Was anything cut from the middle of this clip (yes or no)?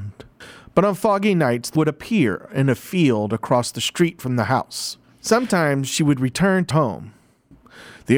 yes